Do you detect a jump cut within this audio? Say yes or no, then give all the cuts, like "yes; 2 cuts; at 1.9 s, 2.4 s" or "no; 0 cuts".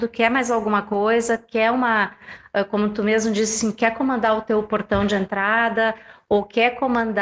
no; 0 cuts